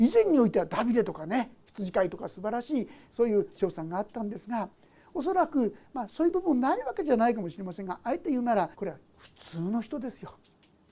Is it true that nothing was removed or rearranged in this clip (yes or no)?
no